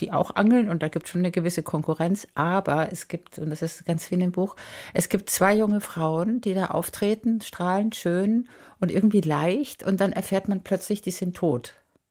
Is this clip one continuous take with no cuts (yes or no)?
no